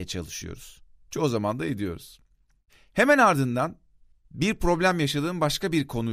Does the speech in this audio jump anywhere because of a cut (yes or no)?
no